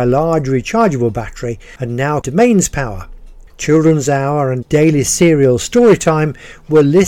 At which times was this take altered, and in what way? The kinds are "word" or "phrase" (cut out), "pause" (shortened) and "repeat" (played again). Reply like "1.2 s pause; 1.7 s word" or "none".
1.8 s pause; 2.2 s word; 3.5 s pause; 4.6 s word